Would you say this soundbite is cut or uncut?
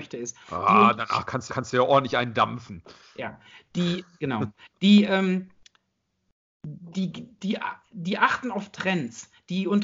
cut